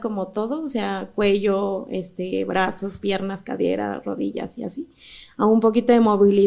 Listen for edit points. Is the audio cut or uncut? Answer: uncut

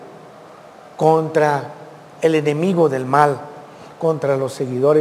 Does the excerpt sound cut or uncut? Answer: uncut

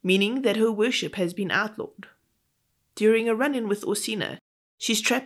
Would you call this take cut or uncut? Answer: uncut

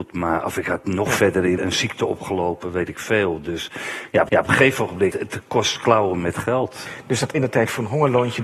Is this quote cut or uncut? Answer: cut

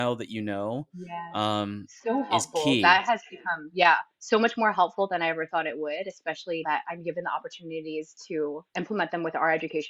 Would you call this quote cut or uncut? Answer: cut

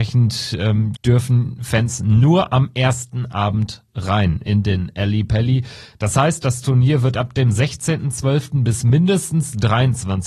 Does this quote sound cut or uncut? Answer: cut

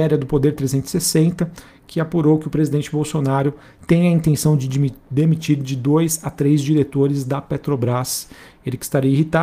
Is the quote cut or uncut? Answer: uncut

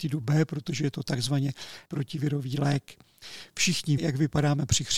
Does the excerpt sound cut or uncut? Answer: cut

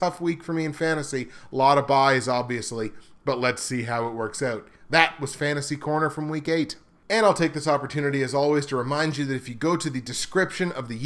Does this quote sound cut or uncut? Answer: uncut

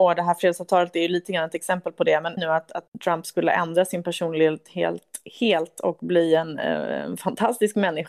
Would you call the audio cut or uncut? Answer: cut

